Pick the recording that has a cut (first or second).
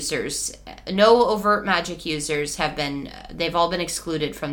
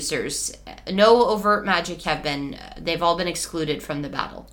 second